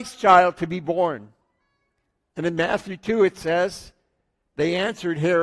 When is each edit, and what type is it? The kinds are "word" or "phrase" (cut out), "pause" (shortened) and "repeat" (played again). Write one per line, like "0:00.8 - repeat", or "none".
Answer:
none

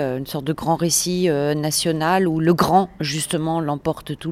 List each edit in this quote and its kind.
none

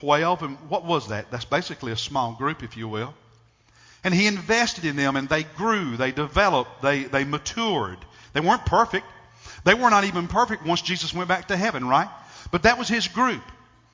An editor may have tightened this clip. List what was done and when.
none

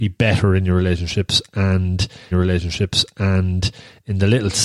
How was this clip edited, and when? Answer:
0:02.3 - repeat

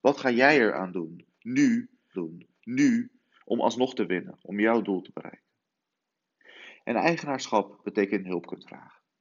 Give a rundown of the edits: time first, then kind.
0:02.1 - repeat
0:08.2 - phrase

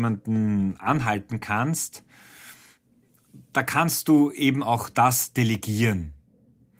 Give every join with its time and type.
none

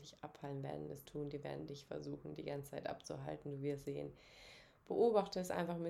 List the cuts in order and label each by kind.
0:01.0 - word
0:03.8 - word

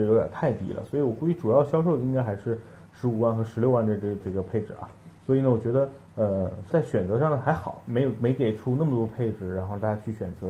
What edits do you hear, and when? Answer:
0:04.2 - phrase
0:05.2 - pause
0:06.7 - phrase

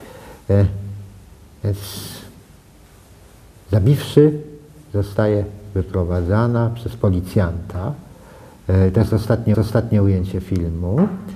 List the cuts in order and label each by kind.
0:09.5 - repeat

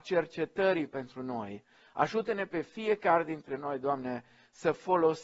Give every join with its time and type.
none

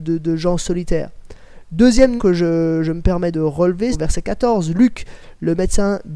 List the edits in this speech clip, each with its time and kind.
0:02.2 - word
0:03.3 - word
0:03.9 - word

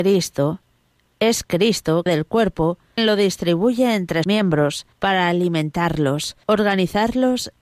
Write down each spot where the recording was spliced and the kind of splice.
0:02.1 - word
0:03.0 - word
0:04.2 - word
0:04.9 - pause
0:06.4 - word

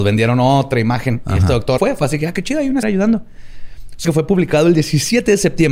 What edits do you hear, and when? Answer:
0:01.8 - word
0:02.8 - word
0:04.0 - word

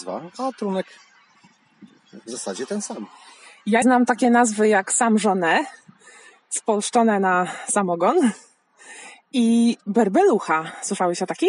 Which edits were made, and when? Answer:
0:03.8 - word

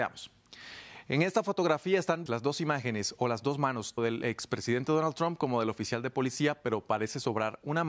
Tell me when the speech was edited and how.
0:02.3 - word
0:04.0 - word

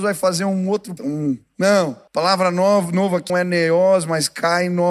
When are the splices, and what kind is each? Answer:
0:01.0 - word
0:02.1 - pause
0:03.3 - word

